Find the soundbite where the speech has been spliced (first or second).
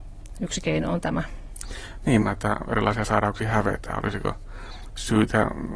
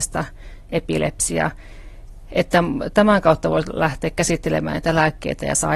first